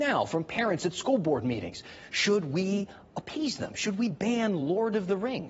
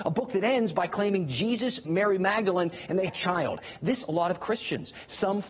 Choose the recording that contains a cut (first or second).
second